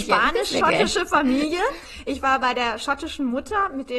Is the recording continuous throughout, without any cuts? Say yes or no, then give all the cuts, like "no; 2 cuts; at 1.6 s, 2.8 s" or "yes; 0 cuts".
yes; 0 cuts